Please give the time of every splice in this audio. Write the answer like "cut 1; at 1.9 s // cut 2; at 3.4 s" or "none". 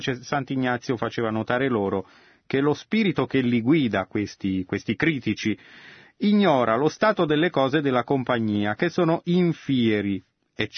none